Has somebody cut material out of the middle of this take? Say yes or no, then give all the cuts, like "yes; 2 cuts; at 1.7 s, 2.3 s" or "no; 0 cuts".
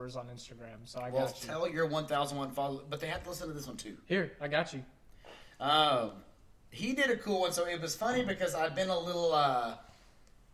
no; 0 cuts